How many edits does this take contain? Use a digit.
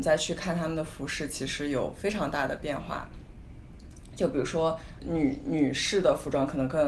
1